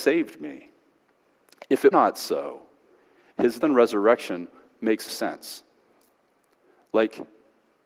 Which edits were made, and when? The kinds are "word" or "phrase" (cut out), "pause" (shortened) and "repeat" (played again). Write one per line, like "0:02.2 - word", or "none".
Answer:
0:01.9 - word
0:03.6 - word
0:05.1 - word